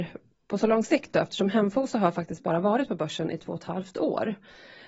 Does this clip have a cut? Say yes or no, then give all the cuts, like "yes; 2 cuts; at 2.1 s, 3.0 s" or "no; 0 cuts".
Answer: no; 0 cuts